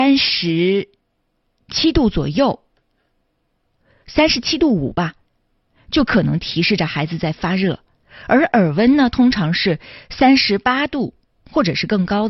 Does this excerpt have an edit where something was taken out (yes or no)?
no